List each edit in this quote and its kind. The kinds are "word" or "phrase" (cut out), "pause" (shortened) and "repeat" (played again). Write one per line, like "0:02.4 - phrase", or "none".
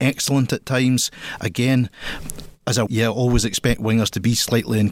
0:02.9 - word